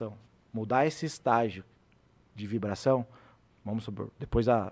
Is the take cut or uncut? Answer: uncut